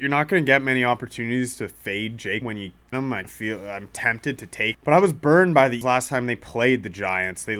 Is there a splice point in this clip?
yes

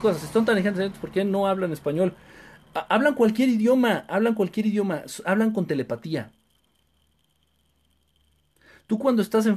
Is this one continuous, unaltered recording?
yes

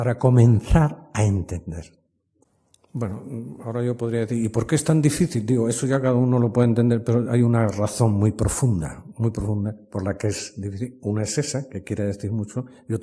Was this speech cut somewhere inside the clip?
no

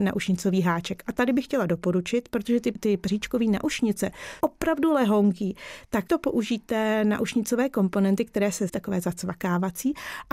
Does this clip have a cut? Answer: yes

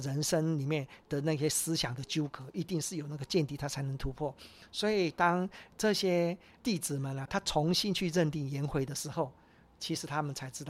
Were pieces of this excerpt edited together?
yes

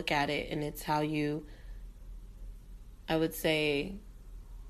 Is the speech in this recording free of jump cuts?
no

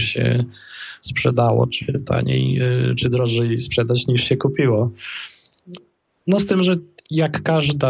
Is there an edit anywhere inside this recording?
no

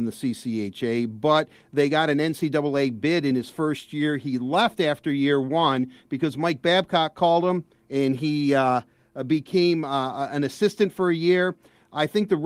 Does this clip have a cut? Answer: no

